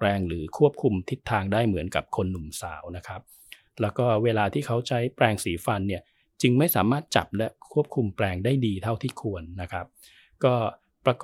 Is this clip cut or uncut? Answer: uncut